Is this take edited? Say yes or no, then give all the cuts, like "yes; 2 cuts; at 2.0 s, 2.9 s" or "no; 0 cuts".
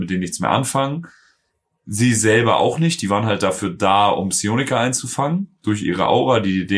no; 0 cuts